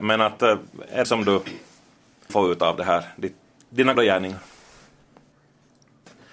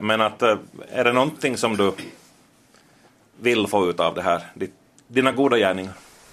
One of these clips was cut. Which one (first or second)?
first